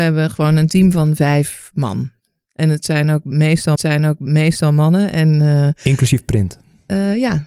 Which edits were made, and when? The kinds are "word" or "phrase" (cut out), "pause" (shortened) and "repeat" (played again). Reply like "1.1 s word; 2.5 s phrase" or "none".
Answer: 3.8 s repeat